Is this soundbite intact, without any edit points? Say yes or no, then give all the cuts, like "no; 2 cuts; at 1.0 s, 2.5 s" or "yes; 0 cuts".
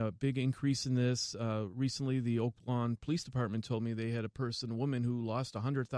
yes; 0 cuts